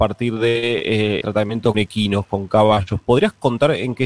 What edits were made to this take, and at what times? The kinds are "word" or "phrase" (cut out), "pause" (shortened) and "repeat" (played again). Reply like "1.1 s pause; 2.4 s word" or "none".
1.2 s word; 1.7 s word